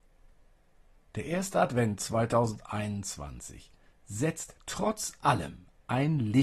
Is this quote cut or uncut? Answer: uncut